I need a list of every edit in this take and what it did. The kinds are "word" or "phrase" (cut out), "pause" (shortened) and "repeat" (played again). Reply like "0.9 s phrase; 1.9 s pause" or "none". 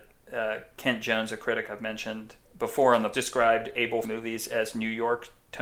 2.4 s pause; 3.1 s phrase; 4.0 s word